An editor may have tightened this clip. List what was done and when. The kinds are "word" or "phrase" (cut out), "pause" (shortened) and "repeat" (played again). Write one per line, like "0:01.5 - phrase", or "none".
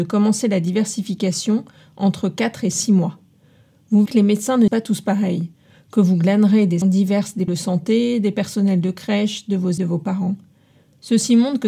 0:04.1 - word
0:04.7 - word
0:06.8 - word
0:07.5 - word
0:09.8 - word